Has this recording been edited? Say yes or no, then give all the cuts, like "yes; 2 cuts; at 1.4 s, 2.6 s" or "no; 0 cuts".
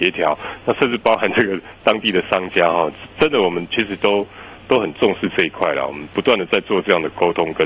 yes; 1 cut; at 4.6 s